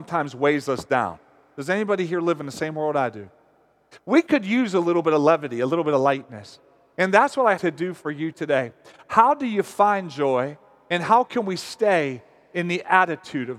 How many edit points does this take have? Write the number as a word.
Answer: one